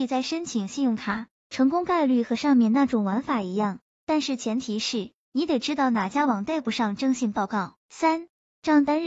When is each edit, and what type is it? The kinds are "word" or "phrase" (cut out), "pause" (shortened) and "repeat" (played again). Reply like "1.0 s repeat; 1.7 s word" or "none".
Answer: 7.8 s pause